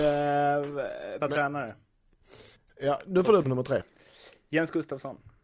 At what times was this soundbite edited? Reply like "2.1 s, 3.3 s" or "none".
1.2 s, 2.5 s, 3.4 s